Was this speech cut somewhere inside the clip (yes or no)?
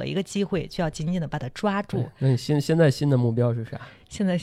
no